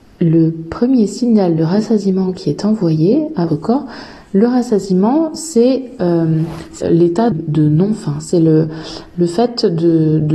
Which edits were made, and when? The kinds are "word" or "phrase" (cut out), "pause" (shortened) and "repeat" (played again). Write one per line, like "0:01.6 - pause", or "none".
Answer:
0:03.5 - word
0:06.8 - word
0:07.3 - word